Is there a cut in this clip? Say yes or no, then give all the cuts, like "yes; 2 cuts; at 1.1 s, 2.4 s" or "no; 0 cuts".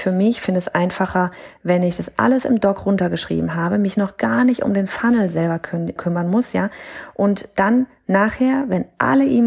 yes; 1 cut; at 6.0 s